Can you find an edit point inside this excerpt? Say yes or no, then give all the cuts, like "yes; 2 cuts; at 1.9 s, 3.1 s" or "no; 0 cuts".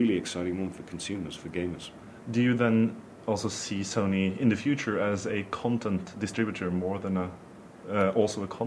no; 0 cuts